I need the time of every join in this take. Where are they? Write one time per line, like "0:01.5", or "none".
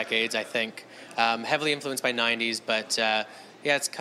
none